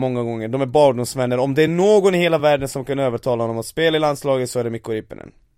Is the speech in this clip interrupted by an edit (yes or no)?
no